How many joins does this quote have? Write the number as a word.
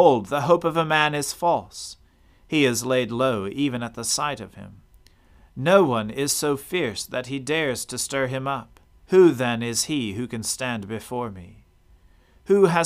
one